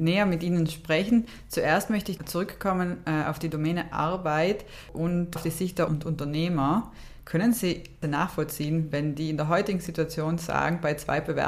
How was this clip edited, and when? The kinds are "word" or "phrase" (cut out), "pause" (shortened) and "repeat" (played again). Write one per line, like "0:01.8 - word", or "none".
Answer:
0:02.2 - word
0:05.4 - word
0:05.9 - word